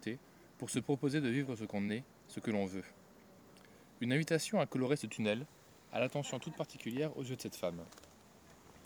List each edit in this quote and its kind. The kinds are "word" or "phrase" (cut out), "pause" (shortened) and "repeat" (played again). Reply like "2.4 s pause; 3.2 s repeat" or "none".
none